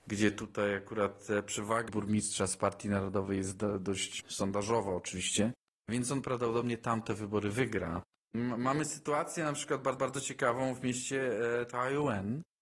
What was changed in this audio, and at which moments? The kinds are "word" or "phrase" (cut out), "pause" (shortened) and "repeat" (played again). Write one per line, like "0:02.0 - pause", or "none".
0:01.9 - word
0:04.2 - word
0:10.0 - repeat